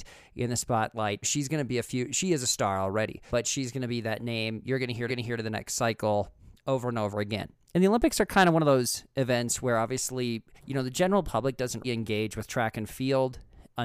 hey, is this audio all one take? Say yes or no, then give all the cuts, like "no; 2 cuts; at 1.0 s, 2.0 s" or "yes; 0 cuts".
no; 5 cuts; at 1.2 s, 3.3 s, 5.1 s, 10.5 s, 11.8 s